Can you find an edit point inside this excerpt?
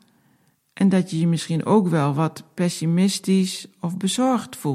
no; 0 cuts

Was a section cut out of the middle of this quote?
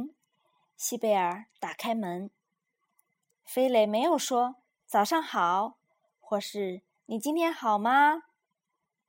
no; 0 cuts

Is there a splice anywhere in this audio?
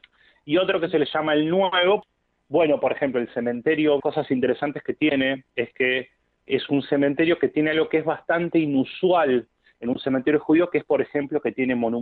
yes; 3 cuts; at 4.0 s, 5.5 s, 6.4 s

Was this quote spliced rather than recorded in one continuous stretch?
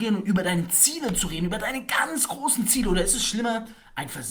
no; 0 cuts

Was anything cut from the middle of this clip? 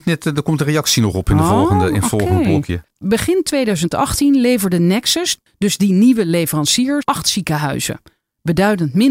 yes; 2 cuts; at 2.9 s, 7.0 s

